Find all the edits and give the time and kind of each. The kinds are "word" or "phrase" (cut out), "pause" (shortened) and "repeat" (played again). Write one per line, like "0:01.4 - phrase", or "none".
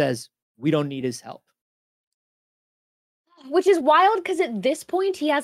none